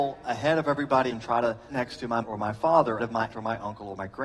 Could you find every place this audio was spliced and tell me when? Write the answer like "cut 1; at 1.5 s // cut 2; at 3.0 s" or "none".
cut 1; at 1.1 s // cut 2; at 1.7 s // cut 3; at 2.2 s // cut 4; at 3.0 s // cut 5; at 3.3 s